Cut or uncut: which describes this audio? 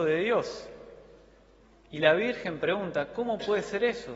uncut